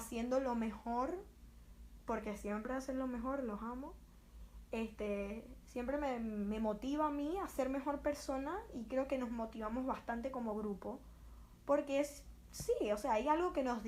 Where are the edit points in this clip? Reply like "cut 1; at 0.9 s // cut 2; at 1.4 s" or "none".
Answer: none